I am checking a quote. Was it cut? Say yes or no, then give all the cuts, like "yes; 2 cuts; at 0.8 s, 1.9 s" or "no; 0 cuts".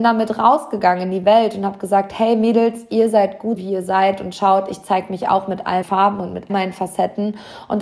yes; 3 cuts; at 3.6 s, 5.8 s, 6.5 s